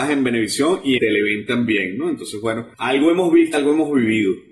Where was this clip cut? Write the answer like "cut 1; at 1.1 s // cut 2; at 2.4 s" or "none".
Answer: cut 1; at 1.0 s // cut 2; at 2.7 s // cut 3; at 3.5 s

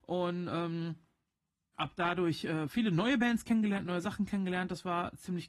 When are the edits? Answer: none

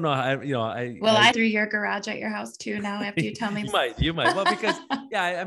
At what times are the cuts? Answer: cut 1; at 1.3 s // cut 2; at 3.7 s

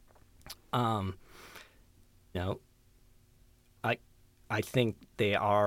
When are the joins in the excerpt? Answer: cut 1; at 2.3 s

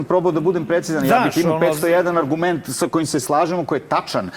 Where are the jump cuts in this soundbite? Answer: cut 1; at 3.2 s

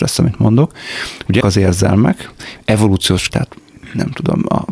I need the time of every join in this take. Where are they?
cut 1; at 1.4 s // cut 2; at 3.3 s

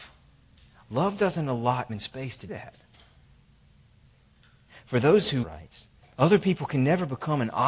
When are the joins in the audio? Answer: cut 1; at 1.9 s // cut 2; at 2.5 s // cut 3; at 5.4 s // cut 4; at 6.0 s

